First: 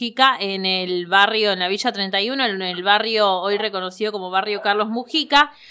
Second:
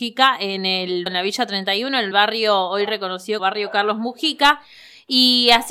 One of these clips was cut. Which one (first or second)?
second